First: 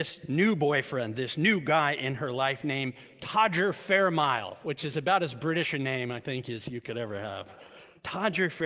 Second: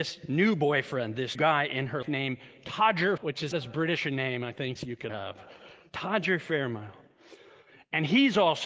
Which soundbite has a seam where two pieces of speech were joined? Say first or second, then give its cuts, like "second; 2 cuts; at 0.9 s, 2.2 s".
second; 6 cuts; at 1.3 s, 2.0 s, 3.2 s, 3.5 s, 4.8 s, 5.1 s